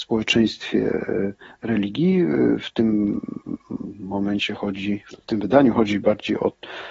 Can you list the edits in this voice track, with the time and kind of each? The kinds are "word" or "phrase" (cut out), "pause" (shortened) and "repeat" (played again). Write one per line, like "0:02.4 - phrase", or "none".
none